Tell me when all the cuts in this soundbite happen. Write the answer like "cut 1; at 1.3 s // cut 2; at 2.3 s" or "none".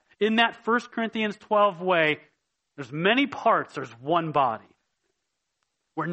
none